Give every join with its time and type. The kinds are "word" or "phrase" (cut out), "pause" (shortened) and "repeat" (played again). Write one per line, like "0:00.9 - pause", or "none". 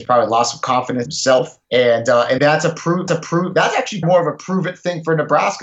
0:01.1 - word
0:01.6 - pause
0:02.4 - word
0:03.1 - repeat
0:04.0 - word